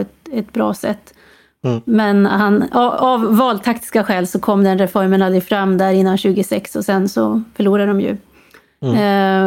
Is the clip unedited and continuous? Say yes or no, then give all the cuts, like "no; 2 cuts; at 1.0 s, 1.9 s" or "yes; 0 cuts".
yes; 0 cuts